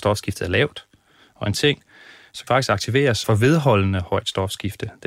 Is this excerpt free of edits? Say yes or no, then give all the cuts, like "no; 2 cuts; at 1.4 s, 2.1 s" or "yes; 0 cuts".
no; 3 cuts; at 1.5 s, 2.5 s, 3.2 s